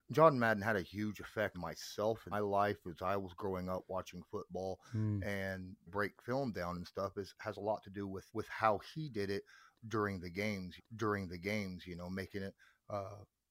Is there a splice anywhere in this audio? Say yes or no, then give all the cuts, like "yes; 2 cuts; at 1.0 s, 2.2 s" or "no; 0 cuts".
yes; 5 cuts; at 1.5 s, 2.3 s, 5.9 s, 8.3 s, 10.8 s